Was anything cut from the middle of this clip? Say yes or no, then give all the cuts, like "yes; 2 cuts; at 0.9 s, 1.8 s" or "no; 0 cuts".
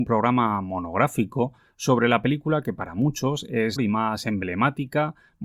yes; 1 cut; at 3.8 s